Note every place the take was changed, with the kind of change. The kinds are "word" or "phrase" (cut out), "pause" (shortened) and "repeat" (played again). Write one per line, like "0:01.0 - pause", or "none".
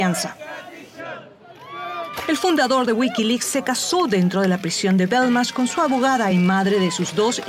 none